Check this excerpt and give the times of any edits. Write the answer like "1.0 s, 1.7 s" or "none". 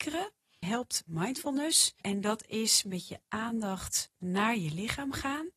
none